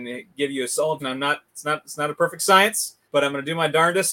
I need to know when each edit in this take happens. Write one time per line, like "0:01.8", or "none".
0:01.0
0:03.0